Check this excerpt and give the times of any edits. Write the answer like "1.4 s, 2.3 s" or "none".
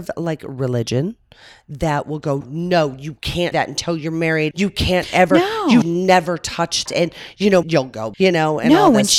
2.4 s, 3.5 s, 4.5 s, 5.8 s, 6.9 s, 7.6 s, 8.1 s